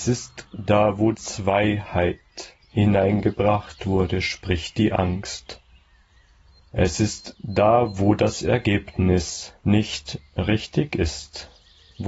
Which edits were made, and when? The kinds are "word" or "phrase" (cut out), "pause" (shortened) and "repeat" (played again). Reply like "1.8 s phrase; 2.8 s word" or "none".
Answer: 1.1 s word